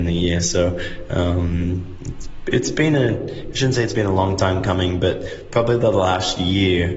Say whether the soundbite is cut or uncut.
uncut